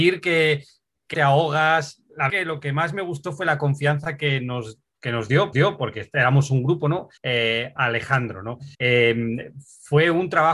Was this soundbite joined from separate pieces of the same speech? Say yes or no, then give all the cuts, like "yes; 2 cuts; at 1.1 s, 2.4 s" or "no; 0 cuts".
yes; 5 cuts; at 1.1 s, 2.3 s, 5.5 s, 7.2 s, 8.7 s